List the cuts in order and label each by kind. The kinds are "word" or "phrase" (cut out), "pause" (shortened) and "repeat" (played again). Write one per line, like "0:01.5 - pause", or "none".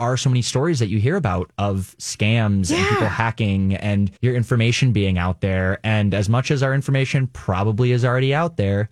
0:04.2 - pause